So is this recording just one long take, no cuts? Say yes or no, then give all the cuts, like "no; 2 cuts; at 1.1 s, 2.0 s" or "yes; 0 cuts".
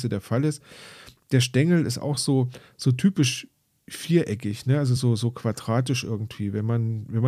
yes; 0 cuts